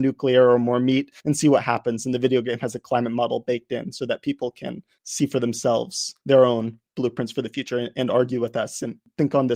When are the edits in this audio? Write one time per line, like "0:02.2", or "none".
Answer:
0:01.2
0:06.2